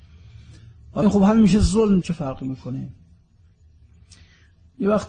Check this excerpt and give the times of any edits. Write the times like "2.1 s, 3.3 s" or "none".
1.0 s, 2.0 s